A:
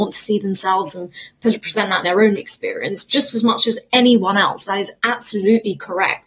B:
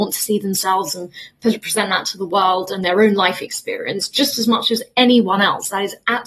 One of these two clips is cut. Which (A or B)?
A